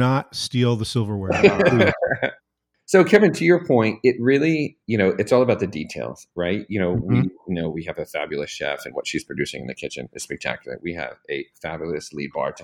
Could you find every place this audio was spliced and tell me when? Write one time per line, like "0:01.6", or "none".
0:02.4
0:04.8